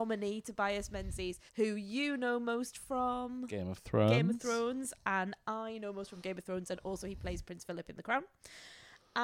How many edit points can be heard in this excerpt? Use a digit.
1